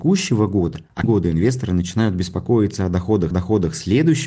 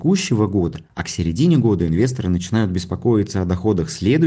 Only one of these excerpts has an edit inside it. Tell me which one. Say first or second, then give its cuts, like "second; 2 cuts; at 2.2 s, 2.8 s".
first; 2 cuts; at 1.0 s, 3.3 s